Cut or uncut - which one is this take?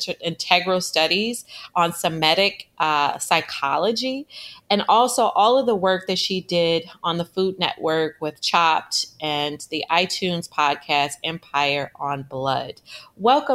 uncut